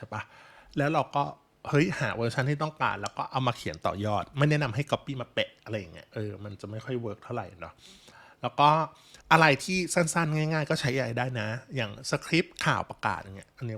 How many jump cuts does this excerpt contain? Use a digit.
1